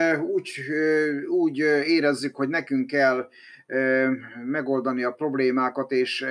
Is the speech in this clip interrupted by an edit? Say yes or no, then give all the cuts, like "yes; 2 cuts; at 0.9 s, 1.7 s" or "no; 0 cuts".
no; 0 cuts